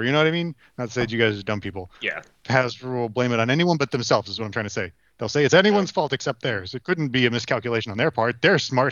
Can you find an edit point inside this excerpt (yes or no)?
no